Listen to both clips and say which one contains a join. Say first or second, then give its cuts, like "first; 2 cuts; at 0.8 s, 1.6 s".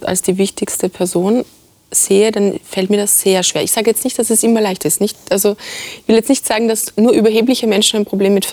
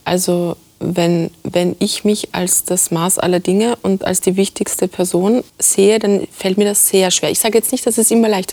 second; 1 cut; at 5.5 s